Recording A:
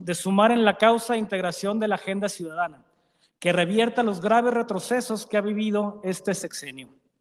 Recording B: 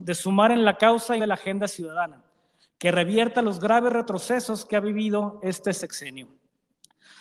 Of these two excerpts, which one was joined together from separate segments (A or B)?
B